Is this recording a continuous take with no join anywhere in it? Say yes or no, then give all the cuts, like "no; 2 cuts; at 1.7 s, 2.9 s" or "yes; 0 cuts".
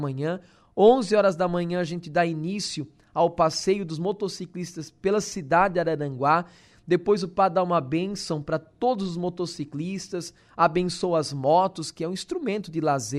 yes; 0 cuts